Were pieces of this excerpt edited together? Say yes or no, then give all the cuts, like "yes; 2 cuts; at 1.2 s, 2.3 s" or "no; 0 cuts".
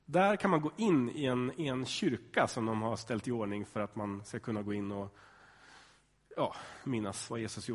no; 0 cuts